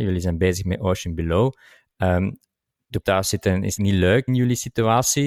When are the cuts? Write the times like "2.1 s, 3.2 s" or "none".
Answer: 3.0 s, 3.8 s, 4.3 s